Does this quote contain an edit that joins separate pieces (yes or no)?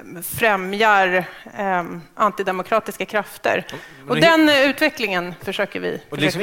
no